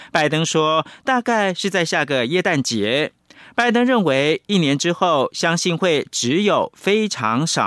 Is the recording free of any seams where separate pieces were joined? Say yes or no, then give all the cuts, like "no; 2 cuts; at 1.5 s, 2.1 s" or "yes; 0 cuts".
no; 1 cut; at 3.2 s